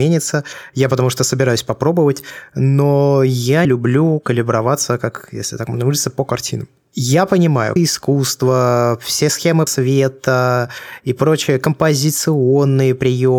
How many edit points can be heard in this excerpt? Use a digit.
3